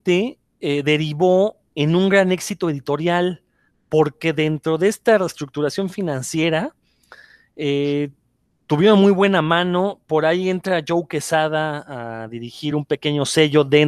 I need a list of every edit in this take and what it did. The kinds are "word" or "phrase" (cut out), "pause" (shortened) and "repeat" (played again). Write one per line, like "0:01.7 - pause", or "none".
none